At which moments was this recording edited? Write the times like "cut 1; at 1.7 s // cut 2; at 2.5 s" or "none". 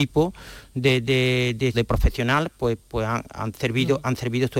cut 1; at 1.7 s